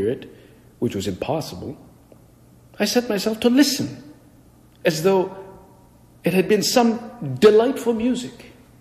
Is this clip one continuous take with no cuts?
yes; 0 cuts

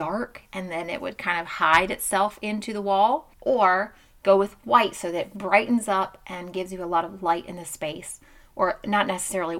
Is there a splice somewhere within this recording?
no; 0 cuts

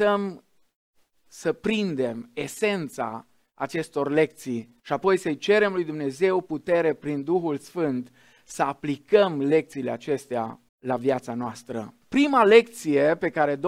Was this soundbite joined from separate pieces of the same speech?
yes; 3 cuts; at 4.8 s, 10.7 s, 12.0 s

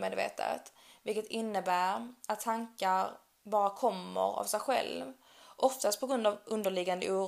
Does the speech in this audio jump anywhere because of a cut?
no; 0 cuts

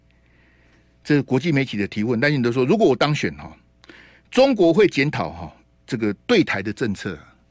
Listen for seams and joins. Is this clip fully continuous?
yes; 0 cuts

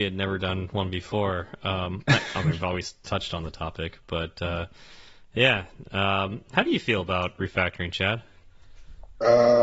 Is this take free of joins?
yes; 0 cuts

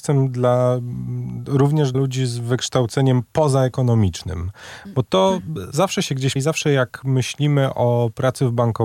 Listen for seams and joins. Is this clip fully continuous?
no; 2 cuts; at 1.9 s, 6.4 s

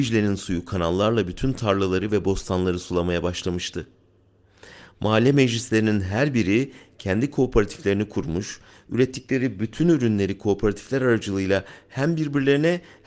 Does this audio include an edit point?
no; 0 cuts

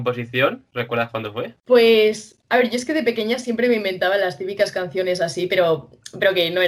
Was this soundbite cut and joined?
no; 0 cuts

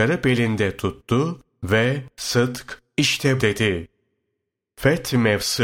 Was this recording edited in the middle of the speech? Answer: yes; 2 cuts; at 2.1 s, 3.4 s

